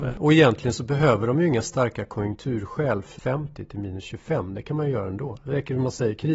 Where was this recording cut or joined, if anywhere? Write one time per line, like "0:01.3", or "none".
0:03.2